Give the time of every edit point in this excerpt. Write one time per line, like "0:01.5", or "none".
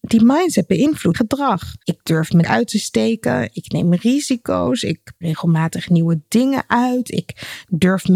0:01.1
0:01.8
0:02.4
0:05.2